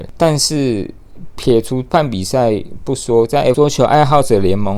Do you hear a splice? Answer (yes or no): yes